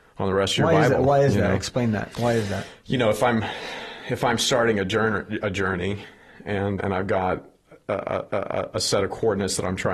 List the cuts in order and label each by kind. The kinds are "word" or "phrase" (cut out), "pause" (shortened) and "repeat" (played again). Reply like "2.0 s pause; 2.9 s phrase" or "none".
6.8 s word; 8.3 s repeat